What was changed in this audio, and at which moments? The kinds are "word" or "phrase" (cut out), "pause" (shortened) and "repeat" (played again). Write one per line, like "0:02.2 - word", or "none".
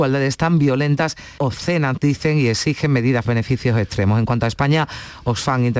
0:01.4 - word
0:03.2 - phrase